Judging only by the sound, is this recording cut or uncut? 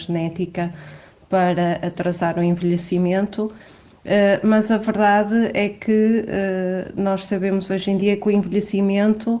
uncut